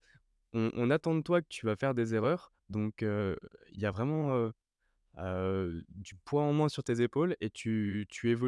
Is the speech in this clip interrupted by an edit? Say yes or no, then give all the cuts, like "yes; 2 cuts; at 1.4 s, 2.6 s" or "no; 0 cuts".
no; 0 cuts